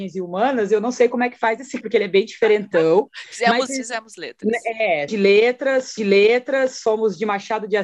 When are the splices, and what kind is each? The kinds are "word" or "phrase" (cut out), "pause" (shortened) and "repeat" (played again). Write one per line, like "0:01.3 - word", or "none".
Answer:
0:01.8 - word
0:03.7 - word
0:05.1 - word
0:06.0 - repeat